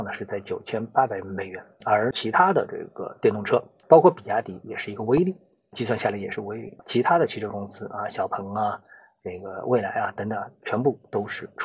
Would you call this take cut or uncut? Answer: uncut